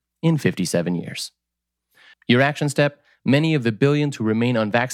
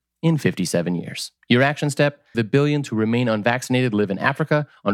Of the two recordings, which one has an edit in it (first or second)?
second